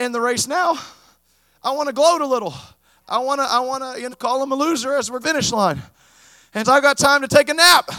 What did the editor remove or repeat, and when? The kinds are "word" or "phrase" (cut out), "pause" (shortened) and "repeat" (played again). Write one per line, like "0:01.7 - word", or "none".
0:04.1 - word
0:05.2 - phrase
0:06.6 - phrase